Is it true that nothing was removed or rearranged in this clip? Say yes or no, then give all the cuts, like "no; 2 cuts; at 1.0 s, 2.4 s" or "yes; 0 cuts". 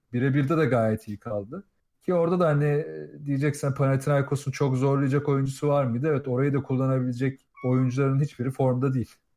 no; 2 cuts; at 1.9 s, 7.5 s